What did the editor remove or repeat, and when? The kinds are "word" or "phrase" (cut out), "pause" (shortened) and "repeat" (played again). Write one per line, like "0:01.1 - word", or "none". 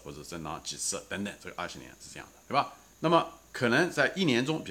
0:02.9 - pause